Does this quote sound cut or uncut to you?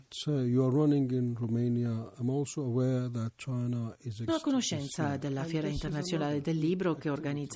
cut